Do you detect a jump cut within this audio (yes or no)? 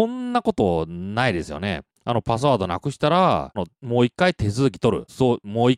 yes